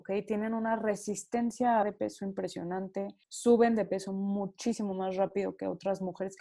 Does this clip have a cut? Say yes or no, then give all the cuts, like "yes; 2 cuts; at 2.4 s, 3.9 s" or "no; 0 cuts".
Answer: yes; 2 cuts; at 1.8 s, 3.2 s